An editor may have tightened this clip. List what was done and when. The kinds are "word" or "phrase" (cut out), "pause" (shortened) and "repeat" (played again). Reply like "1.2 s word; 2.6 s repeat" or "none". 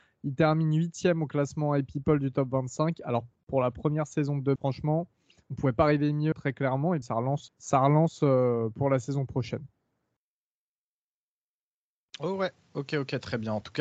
4.6 s word; 6.3 s word; 7.0 s word; 7.5 s word